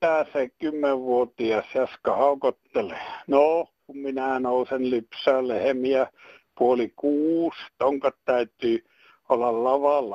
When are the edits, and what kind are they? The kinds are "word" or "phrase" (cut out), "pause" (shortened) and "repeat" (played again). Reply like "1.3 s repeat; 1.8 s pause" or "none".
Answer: none